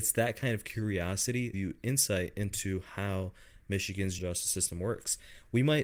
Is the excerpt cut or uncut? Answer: cut